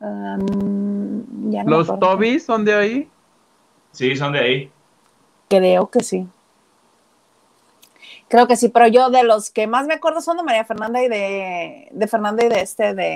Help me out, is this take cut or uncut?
uncut